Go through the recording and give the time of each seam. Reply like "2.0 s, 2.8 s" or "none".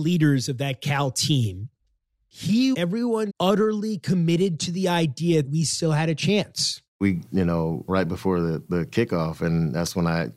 2.7 s, 3.3 s, 5.4 s, 7.3 s, 7.9 s